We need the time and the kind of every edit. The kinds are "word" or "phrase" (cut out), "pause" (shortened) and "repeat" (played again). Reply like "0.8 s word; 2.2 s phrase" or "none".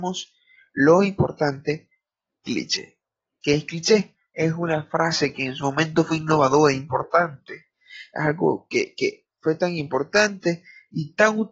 none